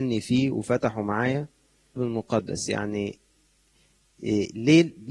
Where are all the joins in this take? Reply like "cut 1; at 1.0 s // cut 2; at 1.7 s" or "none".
cut 1; at 2.0 s